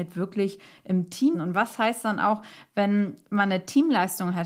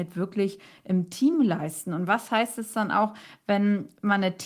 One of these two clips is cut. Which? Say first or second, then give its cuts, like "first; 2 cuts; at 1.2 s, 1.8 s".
first; 2 cuts; at 1.3 s, 2.0 s